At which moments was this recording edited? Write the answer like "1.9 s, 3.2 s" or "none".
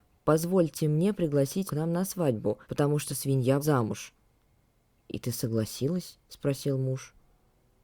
1.7 s, 2.6 s, 3.1 s, 3.6 s, 6.2 s